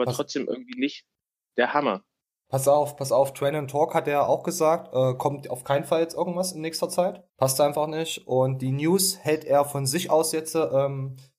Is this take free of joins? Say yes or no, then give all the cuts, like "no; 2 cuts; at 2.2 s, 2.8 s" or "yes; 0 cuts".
no; 1 cut; at 7.3 s